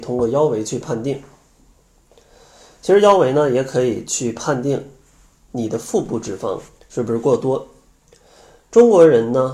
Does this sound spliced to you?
no; 0 cuts

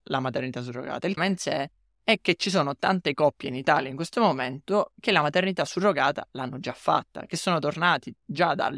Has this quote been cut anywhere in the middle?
yes; 1 cut; at 1.2 s

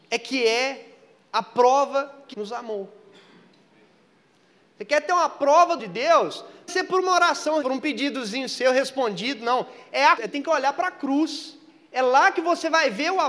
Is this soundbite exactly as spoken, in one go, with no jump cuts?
no; 5 cuts; at 2.3 s, 5.8 s, 6.7 s, 7.6 s, 10.2 s

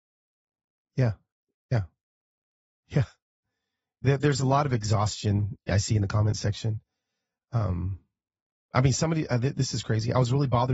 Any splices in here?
no; 0 cuts

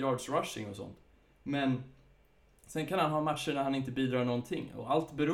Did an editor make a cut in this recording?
no; 0 cuts

